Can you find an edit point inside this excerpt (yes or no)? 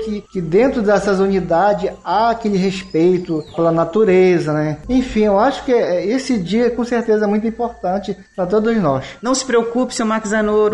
no